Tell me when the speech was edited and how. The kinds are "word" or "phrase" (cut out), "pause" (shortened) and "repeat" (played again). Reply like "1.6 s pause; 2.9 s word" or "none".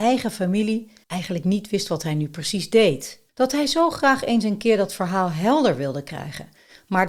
1.0 s pause; 3.3 s pause